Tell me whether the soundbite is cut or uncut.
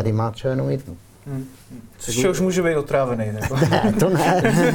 cut